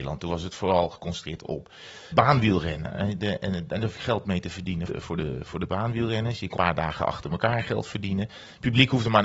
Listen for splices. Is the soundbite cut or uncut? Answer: cut